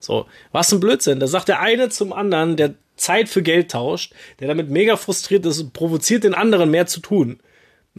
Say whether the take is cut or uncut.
uncut